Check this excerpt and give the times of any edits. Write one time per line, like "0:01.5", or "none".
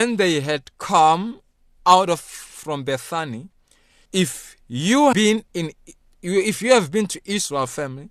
0:04.1
0:05.1